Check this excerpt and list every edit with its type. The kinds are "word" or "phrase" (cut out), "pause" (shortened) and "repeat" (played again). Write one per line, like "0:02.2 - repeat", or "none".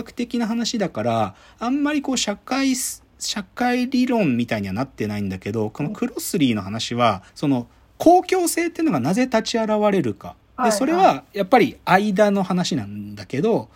0:07.3 - pause
0:10.4 - pause